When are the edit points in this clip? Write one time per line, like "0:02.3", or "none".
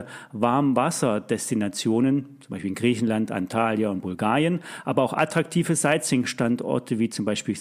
none